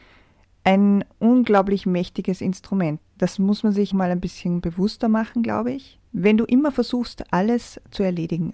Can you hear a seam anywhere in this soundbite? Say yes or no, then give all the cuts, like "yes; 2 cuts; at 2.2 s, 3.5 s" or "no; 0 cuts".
yes; 3 cuts; at 3.1 s, 3.9 s, 6.1 s